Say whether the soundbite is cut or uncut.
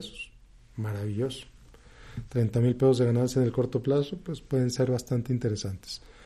uncut